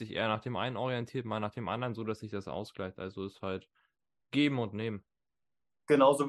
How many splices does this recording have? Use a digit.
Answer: 0